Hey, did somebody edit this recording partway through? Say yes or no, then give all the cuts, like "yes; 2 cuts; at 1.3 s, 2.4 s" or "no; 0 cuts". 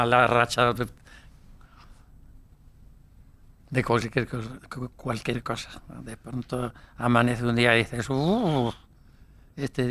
no; 0 cuts